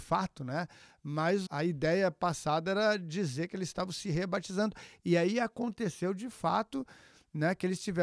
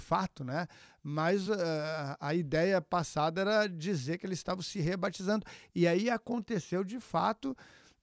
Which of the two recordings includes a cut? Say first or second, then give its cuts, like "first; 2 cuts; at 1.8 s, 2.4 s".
first; 1 cut; at 1.5 s